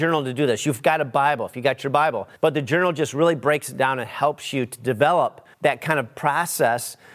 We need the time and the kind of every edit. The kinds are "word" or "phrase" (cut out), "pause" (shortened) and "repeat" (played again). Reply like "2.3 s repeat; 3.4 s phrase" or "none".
2.4 s pause; 5.5 s pause